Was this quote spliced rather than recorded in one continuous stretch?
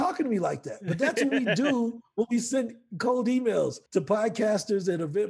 yes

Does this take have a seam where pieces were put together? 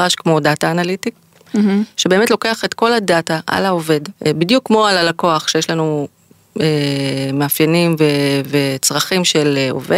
yes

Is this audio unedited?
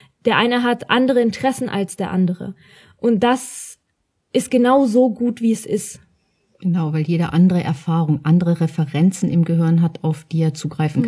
yes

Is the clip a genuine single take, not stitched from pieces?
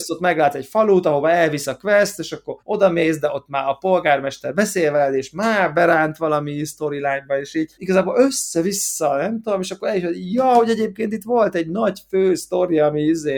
no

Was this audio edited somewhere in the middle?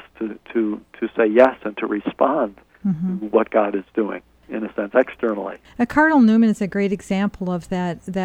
yes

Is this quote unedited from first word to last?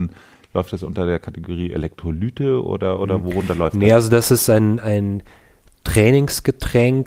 yes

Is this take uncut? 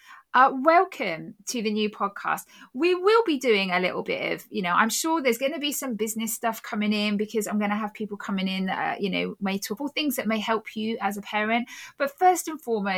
no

